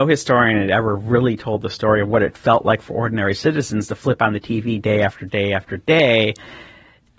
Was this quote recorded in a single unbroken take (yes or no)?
yes